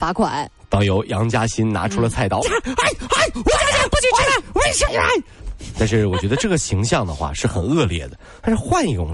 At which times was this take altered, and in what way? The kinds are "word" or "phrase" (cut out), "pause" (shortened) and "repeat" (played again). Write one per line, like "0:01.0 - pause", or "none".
0:02.4 - word
0:04.9 - word